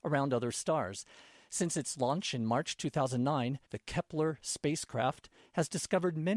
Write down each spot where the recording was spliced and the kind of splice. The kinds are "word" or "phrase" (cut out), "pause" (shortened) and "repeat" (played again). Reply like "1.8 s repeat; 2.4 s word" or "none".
3.6 s pause